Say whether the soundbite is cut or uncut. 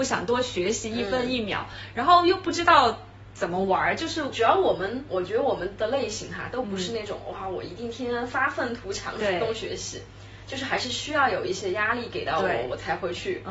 uncut